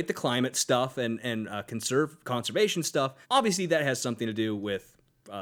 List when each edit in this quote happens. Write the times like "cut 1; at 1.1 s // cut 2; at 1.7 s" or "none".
cut 1; at 3.2 s